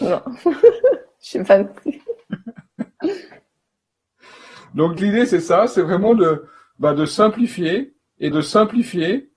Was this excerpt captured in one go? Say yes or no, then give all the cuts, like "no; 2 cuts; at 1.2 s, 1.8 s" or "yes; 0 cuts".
no; 2 cuts; at 5.0 s, 8.3 s